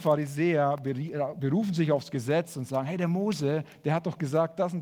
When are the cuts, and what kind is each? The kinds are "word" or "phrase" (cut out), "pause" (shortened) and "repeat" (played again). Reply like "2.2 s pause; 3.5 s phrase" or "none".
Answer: none